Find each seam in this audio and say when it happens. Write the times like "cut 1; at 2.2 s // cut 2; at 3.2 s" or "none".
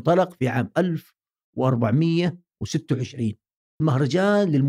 cut 1; at 3.8 s